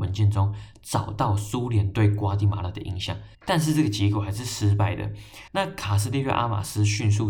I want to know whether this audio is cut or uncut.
cut